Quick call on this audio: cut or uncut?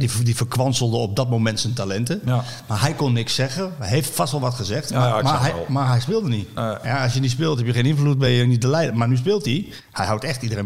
uncut